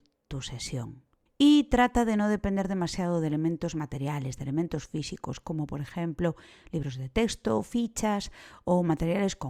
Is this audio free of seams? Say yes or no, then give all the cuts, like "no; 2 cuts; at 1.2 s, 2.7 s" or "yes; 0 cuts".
yes; 0 cuts